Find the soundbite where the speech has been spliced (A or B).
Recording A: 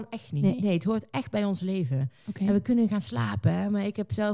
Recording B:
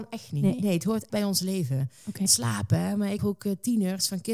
B